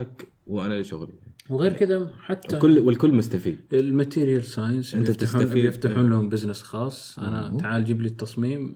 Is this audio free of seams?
no; 1 cut; at 1.4 s

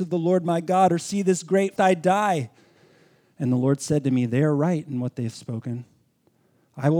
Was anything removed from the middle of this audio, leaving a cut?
yes; 1 cut; at 1.8 s

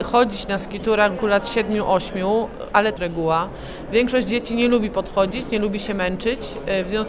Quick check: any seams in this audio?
yes; 2 cuts; at 1.2 s, 3.0 s

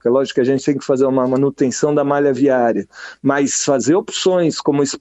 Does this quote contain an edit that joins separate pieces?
no; 0 cuts

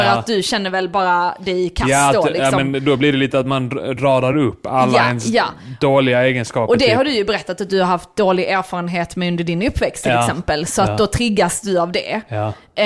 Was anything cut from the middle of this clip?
no; 0 cuts

